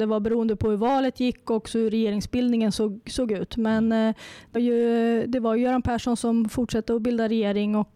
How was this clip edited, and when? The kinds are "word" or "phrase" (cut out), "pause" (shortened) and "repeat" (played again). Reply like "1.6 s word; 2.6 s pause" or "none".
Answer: 1.4 s word; 4.5 s word